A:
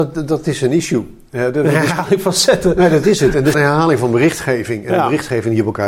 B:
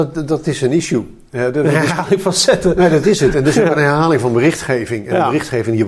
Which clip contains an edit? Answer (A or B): A